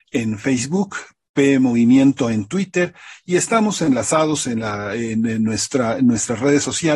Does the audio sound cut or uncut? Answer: uncut